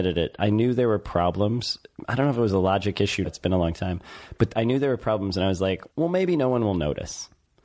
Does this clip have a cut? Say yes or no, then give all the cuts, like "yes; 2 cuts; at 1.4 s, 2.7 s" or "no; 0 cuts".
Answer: yes; 2 cuts; at 3.2 s, 5.9 s